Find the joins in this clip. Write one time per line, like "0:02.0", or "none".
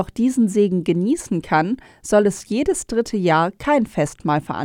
none

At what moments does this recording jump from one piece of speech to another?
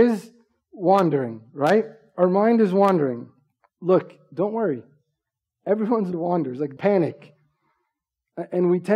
0:03.6
0:06.1
0:06.8

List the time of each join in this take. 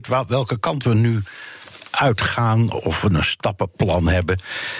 0:02.7

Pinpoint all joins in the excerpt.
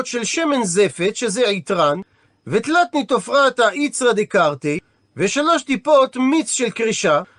none

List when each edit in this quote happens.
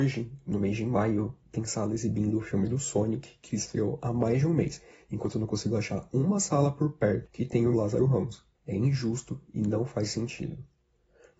0:07.7
0:08.5

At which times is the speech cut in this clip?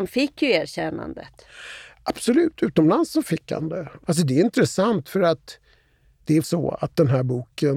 0:06.4

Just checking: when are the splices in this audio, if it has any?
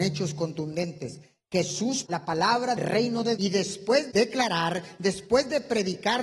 0:02.0
0:02.8
0:03.4
0:04.1

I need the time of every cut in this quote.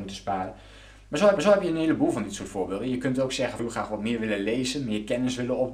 0:01.4
0:03.6

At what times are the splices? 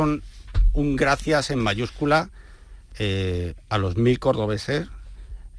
none

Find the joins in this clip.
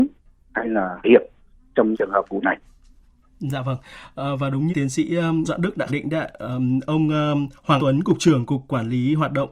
0:01.0
0:01.9
0:02.4
0:04.7
0:05.4
0:05.9
0:07.8

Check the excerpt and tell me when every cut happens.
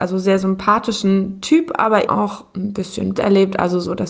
0:02.1
0:03.2

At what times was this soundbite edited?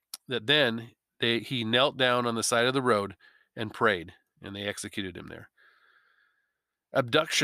none

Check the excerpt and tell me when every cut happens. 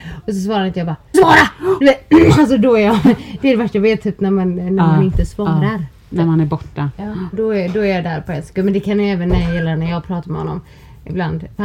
0:01.1
0:07.3

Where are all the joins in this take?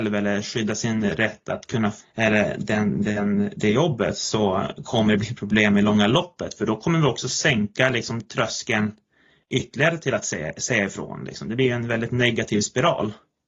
none

